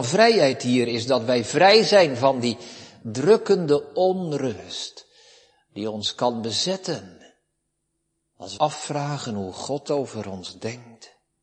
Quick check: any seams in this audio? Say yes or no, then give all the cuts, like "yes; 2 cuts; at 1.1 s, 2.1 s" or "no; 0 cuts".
yes; 1 cut; at 8.6 s